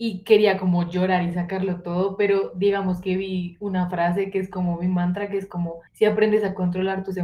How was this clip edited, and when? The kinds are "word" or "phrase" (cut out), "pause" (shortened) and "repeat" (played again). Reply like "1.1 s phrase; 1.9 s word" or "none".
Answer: 5.9 s pause